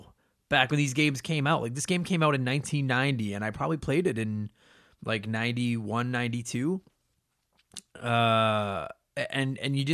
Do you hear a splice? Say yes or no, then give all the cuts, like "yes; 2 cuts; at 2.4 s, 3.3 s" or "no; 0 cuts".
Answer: no; 0 cuts